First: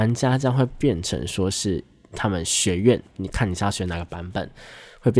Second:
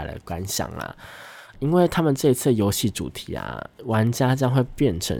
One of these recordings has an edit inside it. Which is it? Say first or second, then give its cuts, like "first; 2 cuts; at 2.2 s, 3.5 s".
second; 1 cut; at 1.5 s